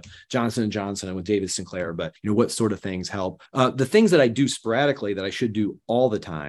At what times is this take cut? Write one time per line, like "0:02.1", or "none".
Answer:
0:02.2
0:03.5